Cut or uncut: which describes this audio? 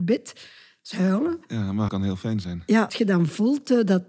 cut